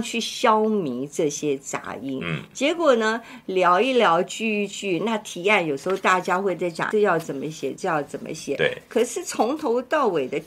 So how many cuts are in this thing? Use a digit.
1